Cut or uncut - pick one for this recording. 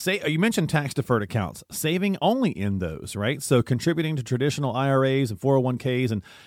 uncut